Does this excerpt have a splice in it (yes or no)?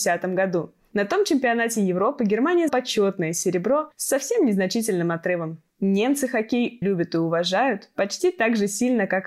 yes